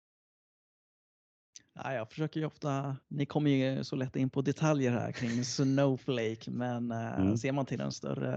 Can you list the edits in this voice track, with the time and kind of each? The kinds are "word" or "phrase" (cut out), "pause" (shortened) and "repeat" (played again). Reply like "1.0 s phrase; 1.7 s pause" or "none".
3.0 s pause